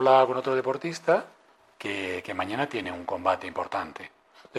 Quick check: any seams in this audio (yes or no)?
no